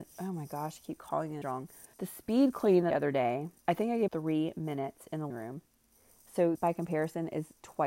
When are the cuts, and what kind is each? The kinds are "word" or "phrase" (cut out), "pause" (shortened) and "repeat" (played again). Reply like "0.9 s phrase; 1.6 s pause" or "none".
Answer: 1.4 s word; 1.9 s pause; 2.9 s phrase; 3.6 s pause; 4.1 s word; 5.3 s word; 6.5 s word